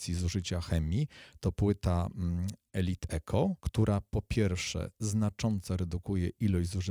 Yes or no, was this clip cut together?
yes